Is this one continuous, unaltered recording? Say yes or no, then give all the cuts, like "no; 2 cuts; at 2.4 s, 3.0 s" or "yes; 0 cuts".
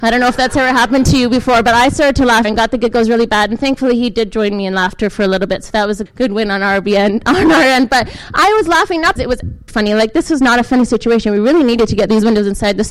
no; 4 cuts; at 2.4 s, 6.1 s, 9.2 s, 9.7 s